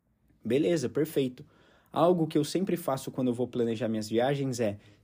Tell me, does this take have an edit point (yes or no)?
no